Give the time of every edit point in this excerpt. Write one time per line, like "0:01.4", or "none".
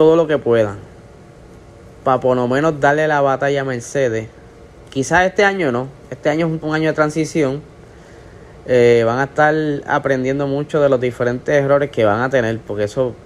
0:06.6